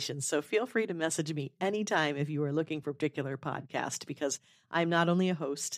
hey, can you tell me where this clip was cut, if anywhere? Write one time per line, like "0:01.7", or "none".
none